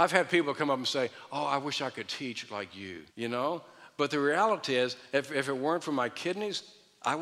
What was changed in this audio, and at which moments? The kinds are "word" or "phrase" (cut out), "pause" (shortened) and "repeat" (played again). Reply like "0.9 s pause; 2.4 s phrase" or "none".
3.1 s pause